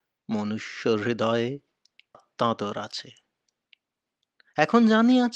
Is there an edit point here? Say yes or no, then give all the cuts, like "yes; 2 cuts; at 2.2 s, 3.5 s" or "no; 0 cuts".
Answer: yes; 1 cut; at 2.1 s